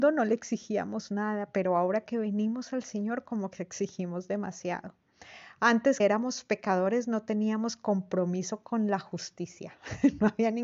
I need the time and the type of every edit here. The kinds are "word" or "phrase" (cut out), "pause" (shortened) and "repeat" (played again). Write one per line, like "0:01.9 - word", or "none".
0:06.0 - word